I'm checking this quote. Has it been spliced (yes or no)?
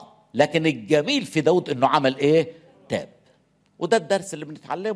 no